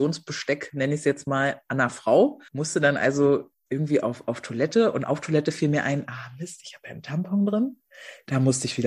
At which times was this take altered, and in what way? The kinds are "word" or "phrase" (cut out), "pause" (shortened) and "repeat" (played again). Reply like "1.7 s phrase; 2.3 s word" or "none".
2.5 s pause; 3.5 s pause